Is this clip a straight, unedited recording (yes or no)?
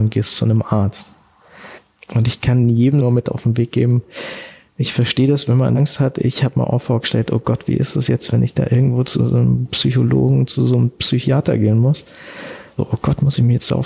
yes